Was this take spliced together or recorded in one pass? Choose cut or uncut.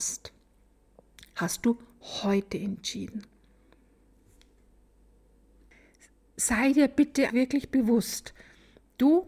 cut